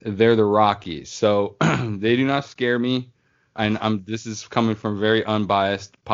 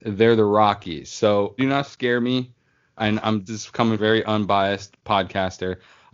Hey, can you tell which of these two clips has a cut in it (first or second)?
second